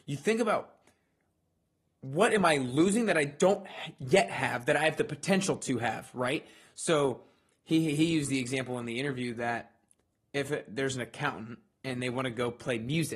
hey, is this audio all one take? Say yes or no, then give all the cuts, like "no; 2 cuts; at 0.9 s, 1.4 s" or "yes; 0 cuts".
yes; 0 cuts